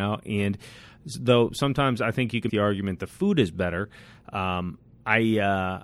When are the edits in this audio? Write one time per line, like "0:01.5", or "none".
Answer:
0:02.5